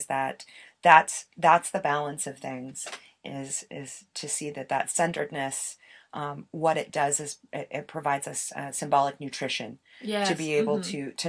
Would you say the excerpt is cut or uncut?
uncut